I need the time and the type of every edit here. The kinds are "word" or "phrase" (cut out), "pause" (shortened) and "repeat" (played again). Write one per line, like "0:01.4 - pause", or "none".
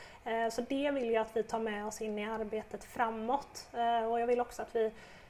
none

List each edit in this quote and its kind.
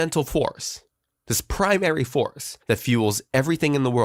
0:02.6 - pause

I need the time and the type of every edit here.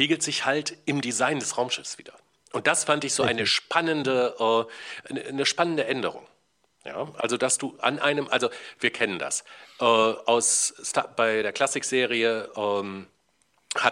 none

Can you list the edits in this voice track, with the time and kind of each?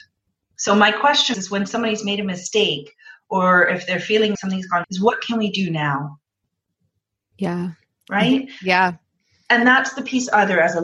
0:01.3 - word
0:04.3 - word
0:04.8 - phrase

